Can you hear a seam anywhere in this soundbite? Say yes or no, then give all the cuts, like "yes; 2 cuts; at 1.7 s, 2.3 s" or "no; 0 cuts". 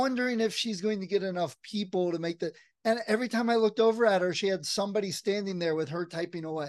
no; 0 cuts